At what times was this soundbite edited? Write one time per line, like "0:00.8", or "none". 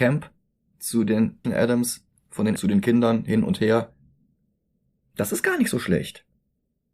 0:01.4
0:02.6